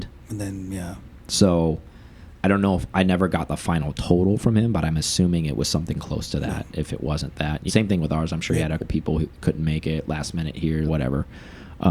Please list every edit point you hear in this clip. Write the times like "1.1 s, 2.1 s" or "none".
7.7 s, 8.8 s, 10.9 s